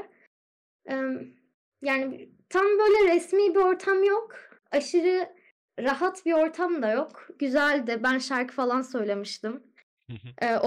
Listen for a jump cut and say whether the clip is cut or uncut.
uncut